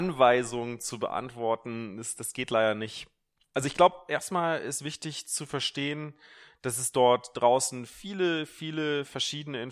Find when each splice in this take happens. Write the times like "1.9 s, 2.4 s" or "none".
none